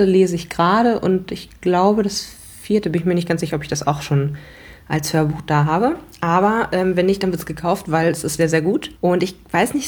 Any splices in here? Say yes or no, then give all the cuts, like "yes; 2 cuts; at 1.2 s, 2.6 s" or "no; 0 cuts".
yes; 1 cut; at 8.4 s